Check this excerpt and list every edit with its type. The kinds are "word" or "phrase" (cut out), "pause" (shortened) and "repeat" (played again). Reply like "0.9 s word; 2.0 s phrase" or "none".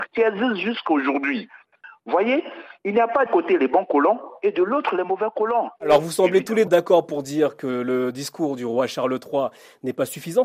3.3 s word; 6.7 s word